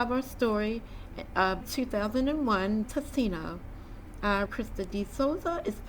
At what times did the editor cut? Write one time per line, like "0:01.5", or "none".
0:01.6
0:02.8
0:04.5